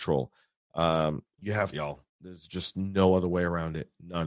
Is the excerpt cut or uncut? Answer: cut